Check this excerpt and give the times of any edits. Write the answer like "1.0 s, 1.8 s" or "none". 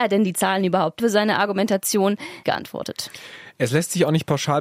1.0 s, 2.4 s